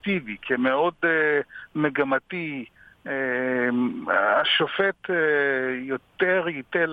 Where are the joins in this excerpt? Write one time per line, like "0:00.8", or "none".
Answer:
none